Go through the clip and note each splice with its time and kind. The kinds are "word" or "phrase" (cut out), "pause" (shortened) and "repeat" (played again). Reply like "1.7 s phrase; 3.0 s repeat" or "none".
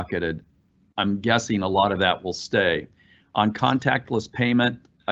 none